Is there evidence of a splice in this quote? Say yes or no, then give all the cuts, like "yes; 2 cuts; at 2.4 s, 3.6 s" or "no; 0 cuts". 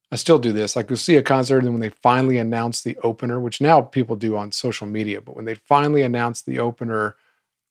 no; 0 cuts